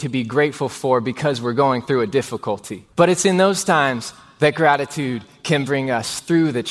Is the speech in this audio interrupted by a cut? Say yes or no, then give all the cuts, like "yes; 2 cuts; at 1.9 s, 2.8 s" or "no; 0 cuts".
yes; 1 cut; at 2.9 s